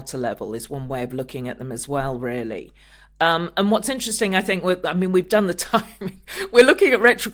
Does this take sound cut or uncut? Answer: uncut